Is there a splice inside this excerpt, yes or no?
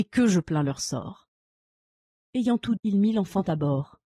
yes